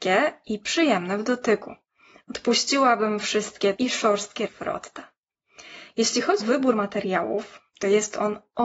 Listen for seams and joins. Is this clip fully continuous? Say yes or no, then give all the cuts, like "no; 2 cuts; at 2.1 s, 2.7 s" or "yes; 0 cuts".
no; 3 cuts; at 3.7 s, 4.5 s, 6.4 s